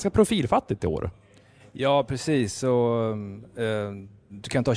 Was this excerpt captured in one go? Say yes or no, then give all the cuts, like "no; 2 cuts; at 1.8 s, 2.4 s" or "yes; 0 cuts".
yes; 0 cuts